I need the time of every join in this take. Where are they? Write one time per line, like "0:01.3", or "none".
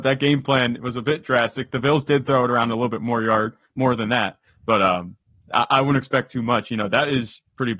none